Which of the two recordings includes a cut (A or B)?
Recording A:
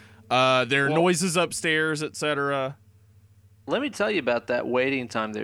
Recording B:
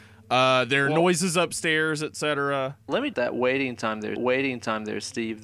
B